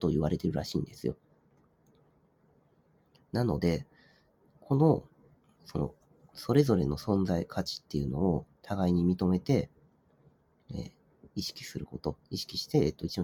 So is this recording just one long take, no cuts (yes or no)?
yes